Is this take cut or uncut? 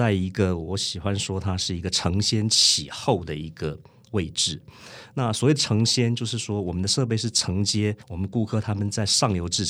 cut